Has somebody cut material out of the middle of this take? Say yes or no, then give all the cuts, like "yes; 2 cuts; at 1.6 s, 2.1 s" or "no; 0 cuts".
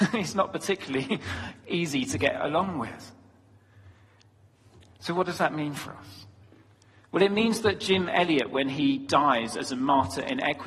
no; 0 cuts